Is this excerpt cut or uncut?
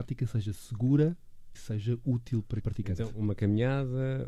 cut